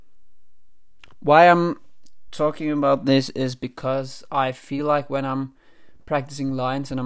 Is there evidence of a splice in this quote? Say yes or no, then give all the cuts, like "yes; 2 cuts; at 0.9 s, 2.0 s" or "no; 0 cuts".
no; 0 cuts